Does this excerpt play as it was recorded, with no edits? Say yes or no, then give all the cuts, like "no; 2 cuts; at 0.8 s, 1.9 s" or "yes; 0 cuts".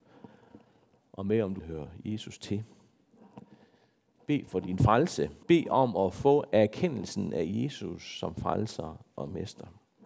no; 2 cuts; at 1.6 s, 5.4 s